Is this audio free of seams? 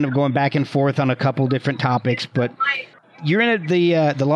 yes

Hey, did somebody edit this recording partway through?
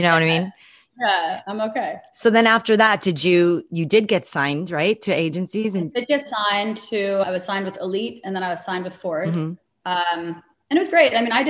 yes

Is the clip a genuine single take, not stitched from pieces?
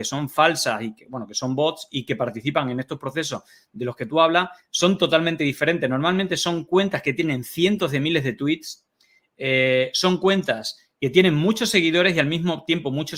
yes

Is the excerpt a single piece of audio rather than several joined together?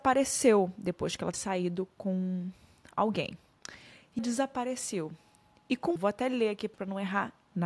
no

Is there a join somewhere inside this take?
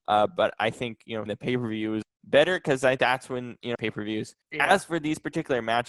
yes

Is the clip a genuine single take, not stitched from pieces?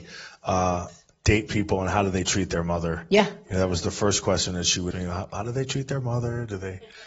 no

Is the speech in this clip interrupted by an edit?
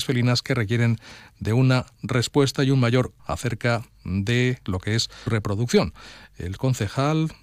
yes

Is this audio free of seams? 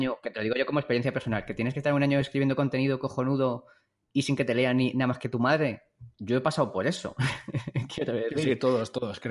yes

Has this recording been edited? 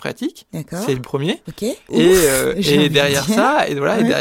yes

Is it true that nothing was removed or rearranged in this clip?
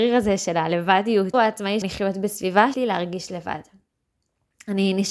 no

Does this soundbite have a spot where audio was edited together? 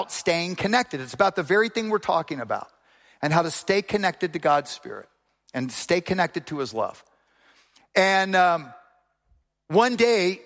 no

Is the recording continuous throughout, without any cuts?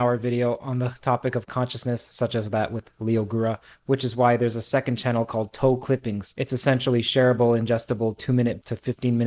yes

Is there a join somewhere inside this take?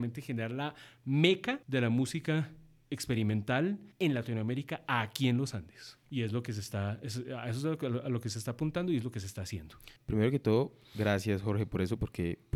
yes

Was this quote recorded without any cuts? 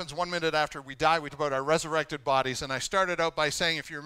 no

